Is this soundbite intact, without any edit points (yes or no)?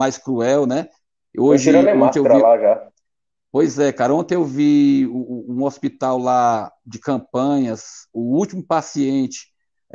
yes